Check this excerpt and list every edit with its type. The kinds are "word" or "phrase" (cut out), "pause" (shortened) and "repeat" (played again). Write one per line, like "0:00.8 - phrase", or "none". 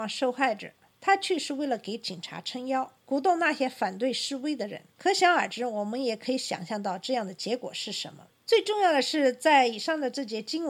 0:03.0 - pause
0:04.9 - pause